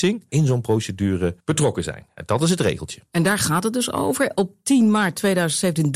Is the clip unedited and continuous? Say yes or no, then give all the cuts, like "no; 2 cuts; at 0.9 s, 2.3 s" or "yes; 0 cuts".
no; 1 cut; at 1.4 s